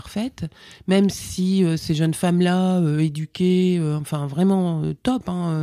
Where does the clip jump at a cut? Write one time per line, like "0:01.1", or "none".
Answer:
none